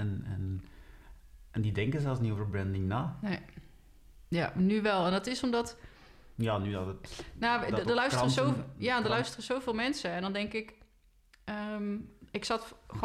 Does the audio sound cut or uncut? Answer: uncut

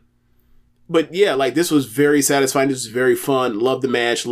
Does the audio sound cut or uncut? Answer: uncut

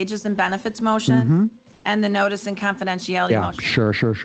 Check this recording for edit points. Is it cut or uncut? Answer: uncut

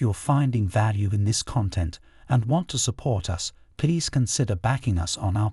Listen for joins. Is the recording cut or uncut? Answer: uncut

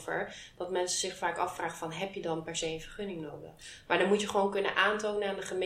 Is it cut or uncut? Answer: uncut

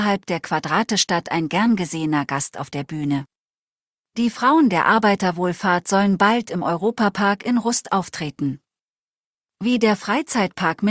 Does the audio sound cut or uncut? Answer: uncut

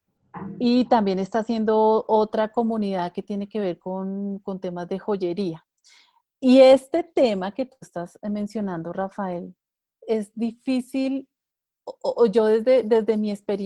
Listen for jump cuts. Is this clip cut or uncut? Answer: uncut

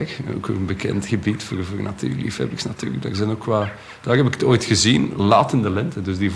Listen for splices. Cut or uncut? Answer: uncut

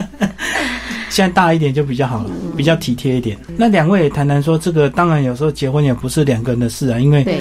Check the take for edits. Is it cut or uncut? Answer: uncut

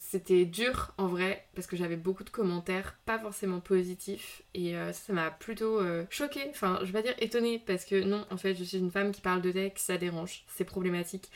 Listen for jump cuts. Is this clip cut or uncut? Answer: uncut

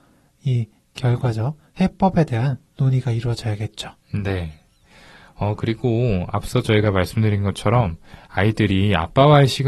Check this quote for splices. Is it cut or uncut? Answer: uncut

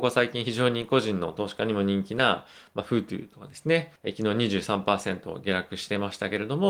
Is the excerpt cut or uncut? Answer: cut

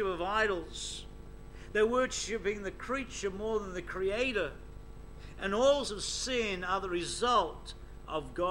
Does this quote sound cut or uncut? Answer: cut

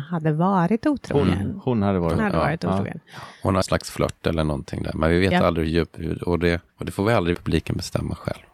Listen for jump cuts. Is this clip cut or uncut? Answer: cut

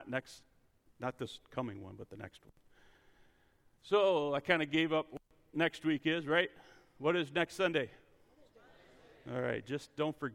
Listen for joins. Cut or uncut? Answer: uncut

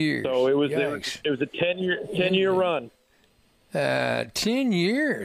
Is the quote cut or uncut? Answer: uncut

